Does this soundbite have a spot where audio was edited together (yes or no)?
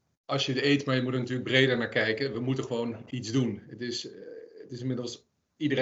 no